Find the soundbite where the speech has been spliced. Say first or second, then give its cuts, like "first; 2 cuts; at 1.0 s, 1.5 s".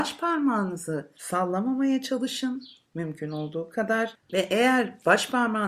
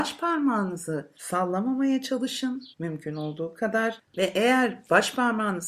second; 1 cut; at 2.7 s